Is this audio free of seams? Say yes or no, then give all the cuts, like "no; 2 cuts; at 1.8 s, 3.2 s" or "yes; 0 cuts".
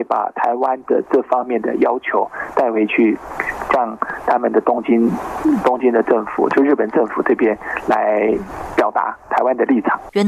yes; 0 cuts